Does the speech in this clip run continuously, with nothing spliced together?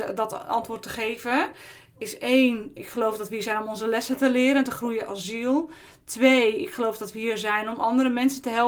yes; 0 cuts

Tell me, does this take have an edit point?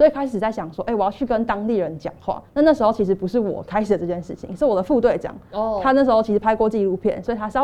yes; 1 cut; at 2.5 s

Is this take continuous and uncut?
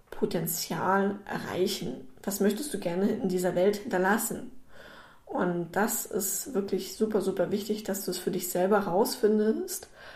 yes; 0 cuts

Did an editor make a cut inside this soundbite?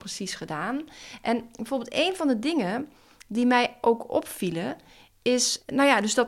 no; 0 cuts

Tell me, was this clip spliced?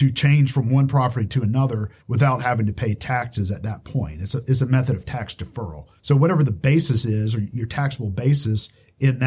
yes; 2 cuts; at 2.0 s, 6.0 s

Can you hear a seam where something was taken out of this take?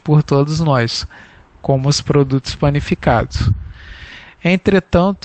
no; 0 cuts

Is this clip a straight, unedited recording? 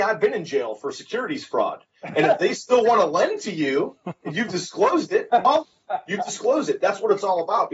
yes; 0 cuts

